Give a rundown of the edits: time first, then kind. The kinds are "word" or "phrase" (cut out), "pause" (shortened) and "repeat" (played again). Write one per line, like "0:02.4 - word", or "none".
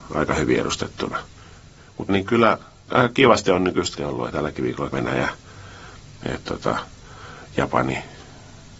0:02.1 - word
0:02.9 - word
0:04.0 - word
0:04.3 - word
0:04.9 - word
0:06.2 - word